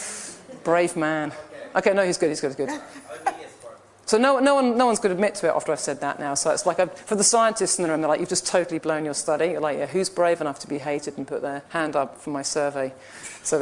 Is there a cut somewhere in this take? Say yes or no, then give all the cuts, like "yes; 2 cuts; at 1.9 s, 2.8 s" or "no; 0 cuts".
yes; 1 cut; at 11.7 s